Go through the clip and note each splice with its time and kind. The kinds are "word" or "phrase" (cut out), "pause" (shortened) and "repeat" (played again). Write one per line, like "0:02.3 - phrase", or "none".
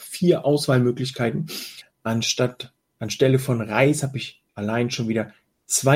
0:04.5 - pause